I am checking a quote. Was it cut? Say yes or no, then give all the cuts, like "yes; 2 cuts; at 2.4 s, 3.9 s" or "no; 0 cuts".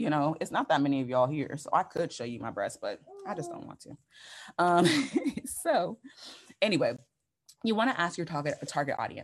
no; 0 cuts